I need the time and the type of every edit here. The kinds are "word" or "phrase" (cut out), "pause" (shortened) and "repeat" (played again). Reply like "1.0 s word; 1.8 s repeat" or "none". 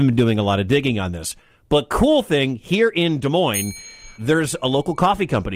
4.1 s word